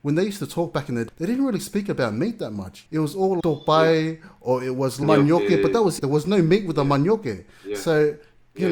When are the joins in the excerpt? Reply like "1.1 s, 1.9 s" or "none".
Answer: 1.1 s, 2.9 s, 3.4 s, 5.0 s, 6.0 s